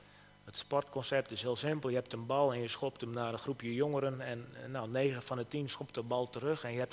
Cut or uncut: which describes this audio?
uncut